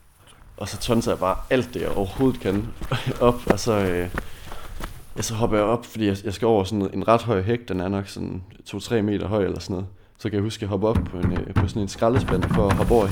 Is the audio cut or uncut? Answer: uncut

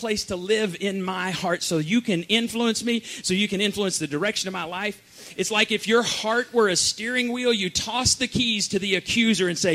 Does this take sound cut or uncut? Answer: uncut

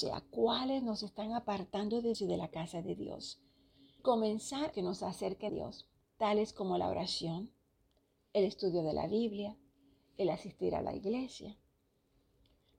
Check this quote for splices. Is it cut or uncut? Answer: cut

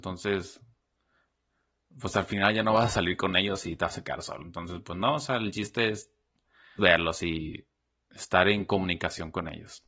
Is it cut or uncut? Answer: cut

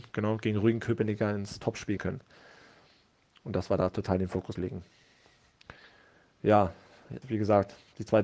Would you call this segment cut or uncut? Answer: cut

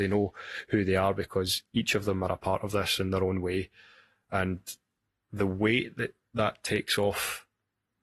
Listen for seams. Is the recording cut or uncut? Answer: uncut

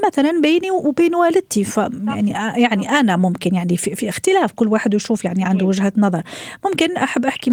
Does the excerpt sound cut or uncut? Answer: uncut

